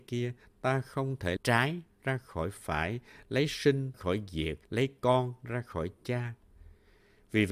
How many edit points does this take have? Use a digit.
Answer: 3